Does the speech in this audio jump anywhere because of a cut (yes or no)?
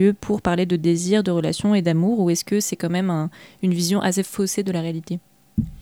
no